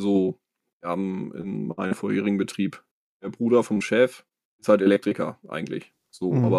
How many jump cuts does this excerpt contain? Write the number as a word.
two